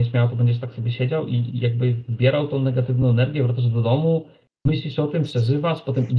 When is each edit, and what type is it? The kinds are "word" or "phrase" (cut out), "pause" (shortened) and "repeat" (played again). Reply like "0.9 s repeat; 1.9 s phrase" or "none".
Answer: none